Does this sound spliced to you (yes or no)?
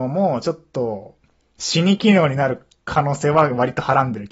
no